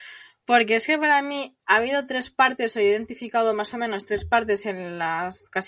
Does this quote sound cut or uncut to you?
uncut